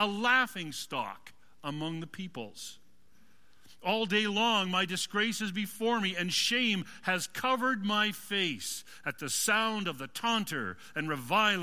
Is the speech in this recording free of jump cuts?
yes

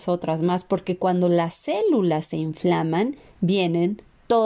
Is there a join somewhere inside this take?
no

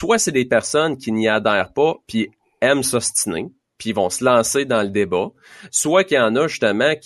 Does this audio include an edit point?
no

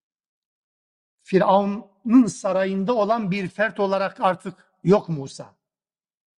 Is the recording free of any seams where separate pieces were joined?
yes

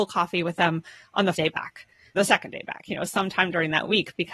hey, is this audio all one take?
no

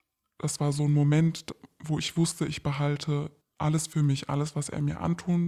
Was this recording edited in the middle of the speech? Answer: yes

